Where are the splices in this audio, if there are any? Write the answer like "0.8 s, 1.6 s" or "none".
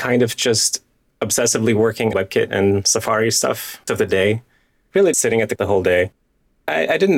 2.1 s, 3.9 s, 5.1 s, 5.6 s